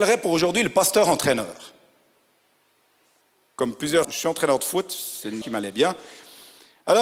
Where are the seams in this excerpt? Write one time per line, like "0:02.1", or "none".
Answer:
0:04.0
0:05.4